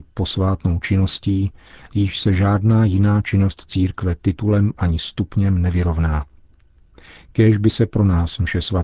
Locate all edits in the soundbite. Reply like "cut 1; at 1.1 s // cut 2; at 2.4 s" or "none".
none